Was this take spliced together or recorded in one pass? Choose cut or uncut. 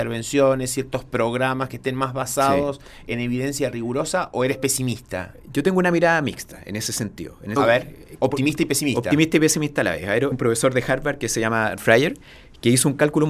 cut